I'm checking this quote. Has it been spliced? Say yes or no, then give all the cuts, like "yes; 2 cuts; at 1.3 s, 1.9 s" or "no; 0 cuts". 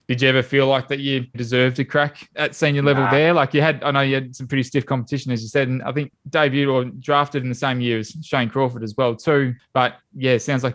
yes; 1 cut; at 1.3 s